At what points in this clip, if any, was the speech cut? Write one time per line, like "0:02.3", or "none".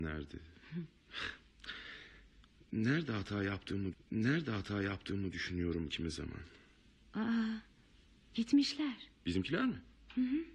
0:03.9
0:09.2